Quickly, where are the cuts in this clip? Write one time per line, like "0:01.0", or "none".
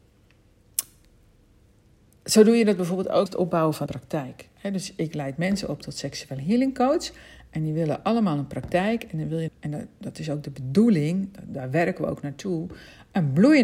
0:03.3
0:03.9
0:09.5